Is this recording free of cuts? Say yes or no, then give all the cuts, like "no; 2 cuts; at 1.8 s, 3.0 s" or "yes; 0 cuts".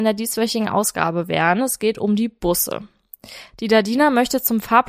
yes; 0 cuts